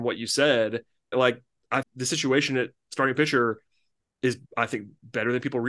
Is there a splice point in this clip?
yes; 3 cuts; at 1.1 s, 1.8 s, 4.5 s

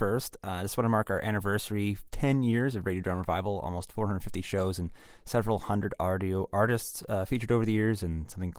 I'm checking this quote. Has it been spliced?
no; 0 cuts

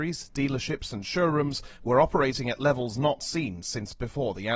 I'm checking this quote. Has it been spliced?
no; 0 cuts

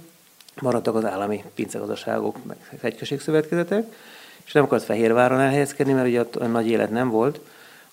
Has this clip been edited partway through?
no; 0 cuts

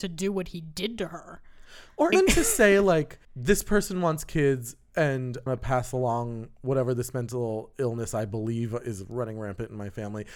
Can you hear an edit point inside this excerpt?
yes; 3 cuts; at 2.1 s, 3.2 s, 5.5 s

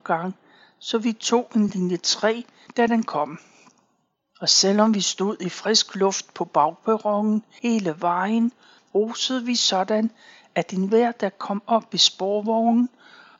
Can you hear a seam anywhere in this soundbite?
no; 0 cuts

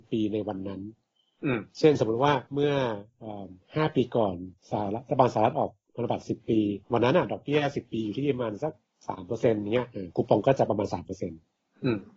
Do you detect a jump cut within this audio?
yes; 4 cuts; at 2.5 s, 4.6 s, 6.8 s, 9.0 s

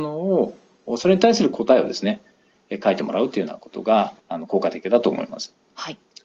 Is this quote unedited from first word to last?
no; 1 cut; at 4.2 s

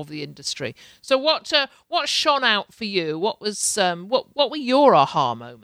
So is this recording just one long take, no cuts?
yes; 0 cuts

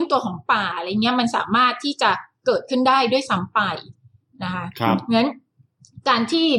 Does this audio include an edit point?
no; 0 cuts

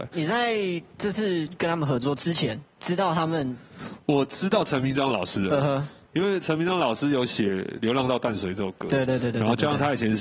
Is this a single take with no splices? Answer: yes; 0 cuts

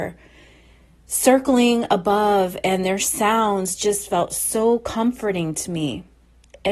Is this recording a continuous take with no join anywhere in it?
yes; 0 cuts

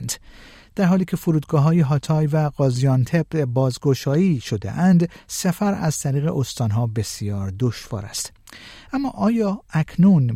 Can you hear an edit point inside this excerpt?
no; 0 cuts

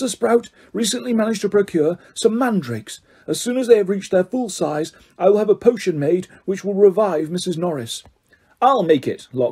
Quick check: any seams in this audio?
no; 0 cuts

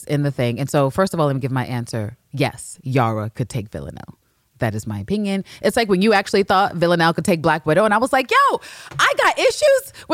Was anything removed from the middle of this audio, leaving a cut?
no; 0 cuts

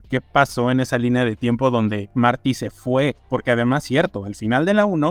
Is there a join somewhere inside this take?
no; 0 cuts

